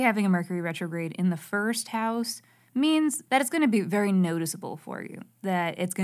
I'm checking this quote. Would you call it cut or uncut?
uncut